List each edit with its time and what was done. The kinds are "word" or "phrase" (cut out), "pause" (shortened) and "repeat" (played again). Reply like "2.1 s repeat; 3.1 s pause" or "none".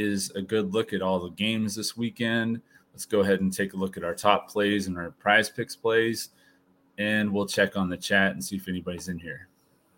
none